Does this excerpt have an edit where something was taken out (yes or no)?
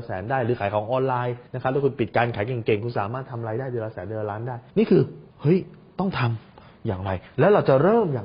yes